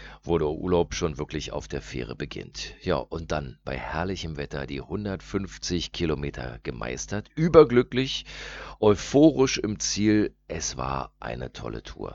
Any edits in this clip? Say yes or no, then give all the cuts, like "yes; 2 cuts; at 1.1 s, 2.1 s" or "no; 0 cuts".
no; 0 cuts